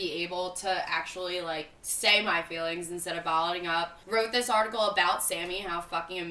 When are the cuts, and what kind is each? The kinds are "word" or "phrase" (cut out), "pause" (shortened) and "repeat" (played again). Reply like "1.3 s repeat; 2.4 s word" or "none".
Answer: 4.0 s pause